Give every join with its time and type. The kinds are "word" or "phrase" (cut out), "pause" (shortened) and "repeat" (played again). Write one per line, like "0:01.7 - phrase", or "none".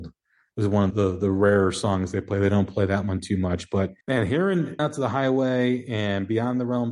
0:00.9 - word
0:04.0 - pause
0:04.8 - word